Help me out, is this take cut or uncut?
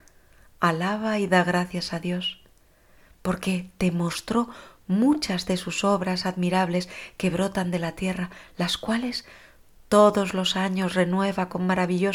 uncut